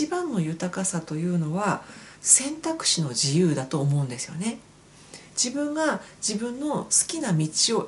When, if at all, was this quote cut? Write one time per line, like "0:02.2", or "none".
0:02.1